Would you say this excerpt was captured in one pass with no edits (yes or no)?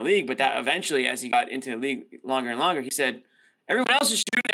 yes